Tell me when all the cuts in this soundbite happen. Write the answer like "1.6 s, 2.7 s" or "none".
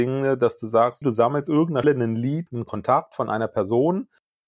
1.0 s, 1.5 s, 1.8 s, 2.5 s